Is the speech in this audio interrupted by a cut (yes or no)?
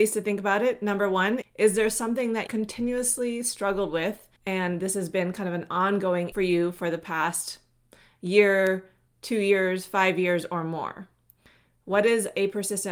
yes